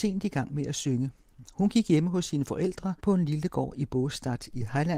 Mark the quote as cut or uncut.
cut